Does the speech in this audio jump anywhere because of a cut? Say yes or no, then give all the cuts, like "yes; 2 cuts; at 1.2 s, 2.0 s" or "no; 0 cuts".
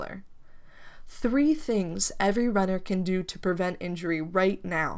no; 0 cuts